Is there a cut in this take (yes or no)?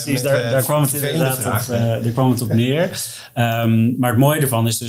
no